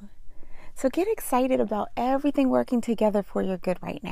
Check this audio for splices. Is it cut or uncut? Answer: uncut